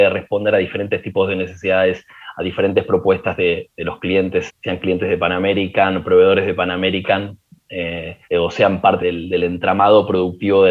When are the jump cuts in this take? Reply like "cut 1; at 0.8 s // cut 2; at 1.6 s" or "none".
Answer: cut 1; at 4.5 s // cut 2; at 8.2 s // cut 3; at 9.0 s